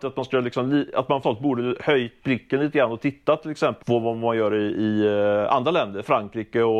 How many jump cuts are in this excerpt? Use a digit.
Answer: 2